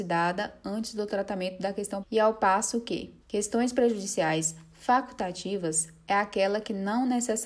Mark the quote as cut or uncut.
cut